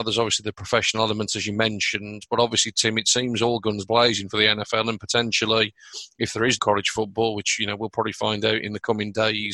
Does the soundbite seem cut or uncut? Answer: cut